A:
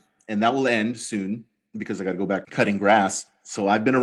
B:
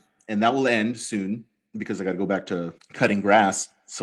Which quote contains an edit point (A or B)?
A